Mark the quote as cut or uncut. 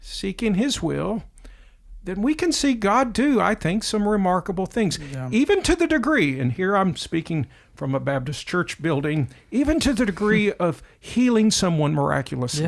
uncut